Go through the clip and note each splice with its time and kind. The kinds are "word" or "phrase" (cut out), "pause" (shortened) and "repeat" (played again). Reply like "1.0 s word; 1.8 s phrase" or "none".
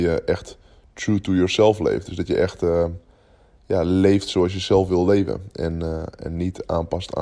none